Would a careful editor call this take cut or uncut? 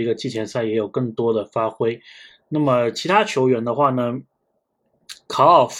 uncut